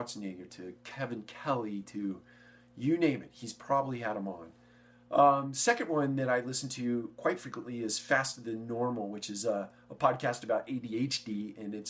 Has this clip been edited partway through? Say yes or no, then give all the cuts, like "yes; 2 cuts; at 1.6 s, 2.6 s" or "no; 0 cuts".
no; 0 cuts